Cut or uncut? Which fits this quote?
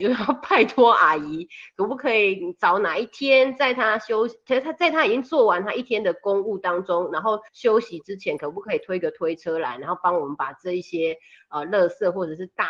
cut